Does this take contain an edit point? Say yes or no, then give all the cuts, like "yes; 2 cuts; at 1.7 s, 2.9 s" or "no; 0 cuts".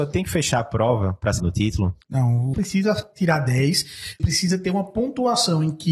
yes; 4 cuts; at 1.4 s, 2.0 s, 2.5 s, 4.2 s